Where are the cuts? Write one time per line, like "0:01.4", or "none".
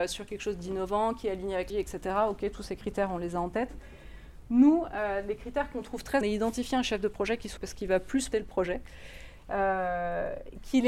0:01.7
0:06.2
0:07.6
0:08.3